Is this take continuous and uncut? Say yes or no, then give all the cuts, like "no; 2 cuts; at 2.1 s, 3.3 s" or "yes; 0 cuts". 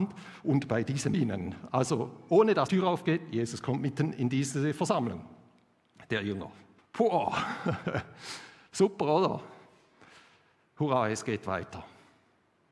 no; 3 cuts; at 1.1 s, 2.7 s, 6.8 s